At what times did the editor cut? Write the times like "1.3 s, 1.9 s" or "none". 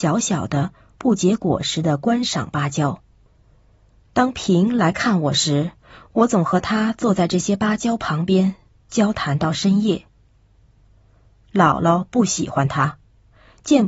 none